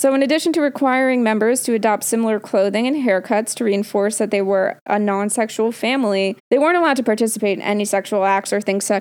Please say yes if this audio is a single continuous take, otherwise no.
no